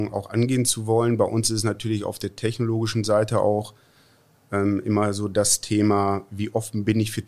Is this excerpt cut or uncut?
uncut